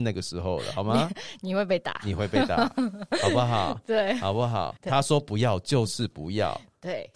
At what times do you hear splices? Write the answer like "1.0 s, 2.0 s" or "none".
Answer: 4.8 s